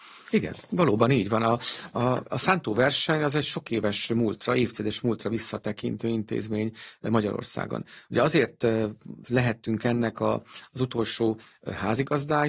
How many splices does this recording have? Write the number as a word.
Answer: zero